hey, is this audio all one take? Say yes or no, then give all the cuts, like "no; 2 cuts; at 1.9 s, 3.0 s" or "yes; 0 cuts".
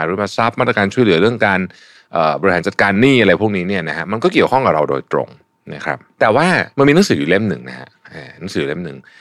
no; 1 cut; at 6.7 s